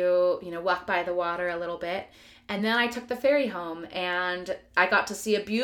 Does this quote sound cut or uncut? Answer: uncut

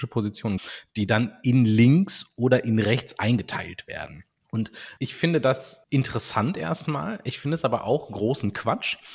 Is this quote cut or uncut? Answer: uncut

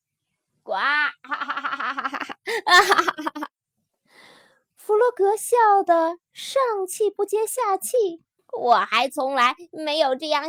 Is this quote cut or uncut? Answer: cut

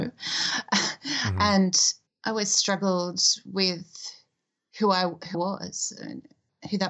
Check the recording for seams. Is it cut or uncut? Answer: cut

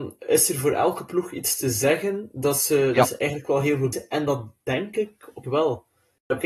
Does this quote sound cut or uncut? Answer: cut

